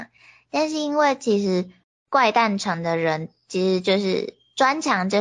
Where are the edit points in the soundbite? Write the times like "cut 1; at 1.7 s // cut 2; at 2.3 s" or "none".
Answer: cut 1; at 1.8 s